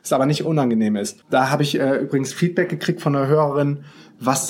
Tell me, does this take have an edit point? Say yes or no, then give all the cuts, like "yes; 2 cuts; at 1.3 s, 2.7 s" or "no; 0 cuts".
yes; 1 cut; at 1.2 s